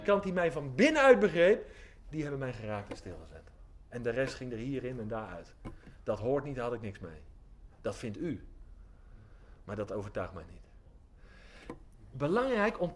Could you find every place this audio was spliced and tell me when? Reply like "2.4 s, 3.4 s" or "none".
none